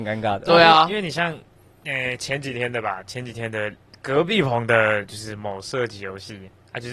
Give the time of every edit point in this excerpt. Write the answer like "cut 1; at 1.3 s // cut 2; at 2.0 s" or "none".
none